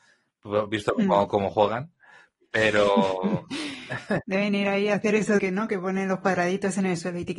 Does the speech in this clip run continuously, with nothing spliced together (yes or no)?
no